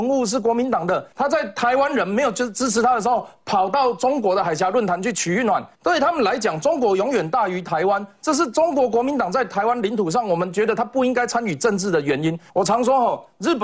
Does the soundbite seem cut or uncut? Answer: cut